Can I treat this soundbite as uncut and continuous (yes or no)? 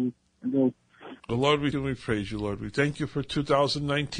no